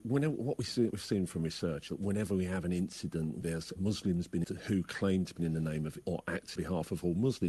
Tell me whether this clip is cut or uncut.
cut